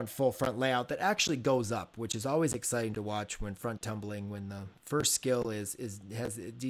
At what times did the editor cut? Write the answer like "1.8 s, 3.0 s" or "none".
none